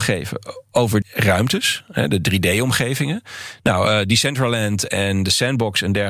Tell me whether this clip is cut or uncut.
cut